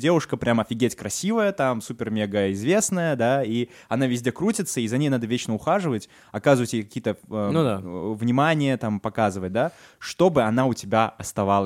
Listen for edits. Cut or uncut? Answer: uncut